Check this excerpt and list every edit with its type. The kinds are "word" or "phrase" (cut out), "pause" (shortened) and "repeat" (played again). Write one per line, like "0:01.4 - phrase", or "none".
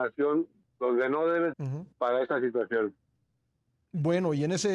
0:01.5 - word
0:01.9 - pause